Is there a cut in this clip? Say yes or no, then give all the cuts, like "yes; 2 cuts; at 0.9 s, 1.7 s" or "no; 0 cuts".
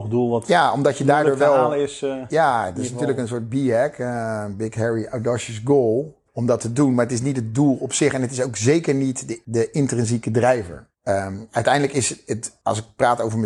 no; 0 cuts